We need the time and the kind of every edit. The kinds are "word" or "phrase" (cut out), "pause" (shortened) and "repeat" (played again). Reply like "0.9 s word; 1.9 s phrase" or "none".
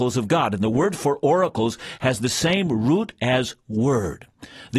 none